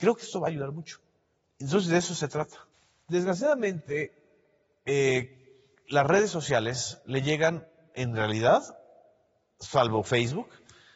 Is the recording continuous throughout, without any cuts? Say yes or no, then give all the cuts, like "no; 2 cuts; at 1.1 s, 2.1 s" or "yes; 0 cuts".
yes; 0 cuts